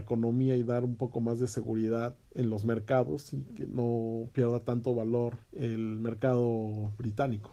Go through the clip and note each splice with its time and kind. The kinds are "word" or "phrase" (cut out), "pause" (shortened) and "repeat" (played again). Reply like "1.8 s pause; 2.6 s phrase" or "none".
2.2 s pause; 5.5 s pause